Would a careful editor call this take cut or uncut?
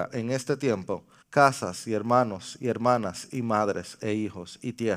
cut